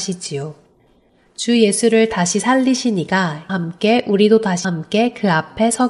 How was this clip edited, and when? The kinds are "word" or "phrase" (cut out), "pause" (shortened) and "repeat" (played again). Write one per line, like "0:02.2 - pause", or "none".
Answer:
0:03.5 - word
0:04.6 - phrase